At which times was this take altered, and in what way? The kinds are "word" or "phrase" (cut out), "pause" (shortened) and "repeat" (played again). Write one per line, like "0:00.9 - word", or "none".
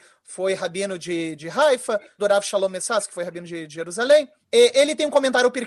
0:01.4 - word
0:02.2 - word
0:03.7 - word
0:04.4 - pause